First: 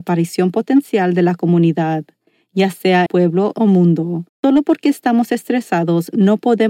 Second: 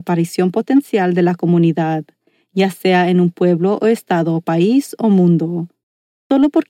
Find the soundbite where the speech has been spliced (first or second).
first